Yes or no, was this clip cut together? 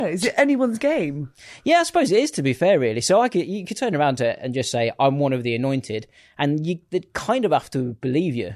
no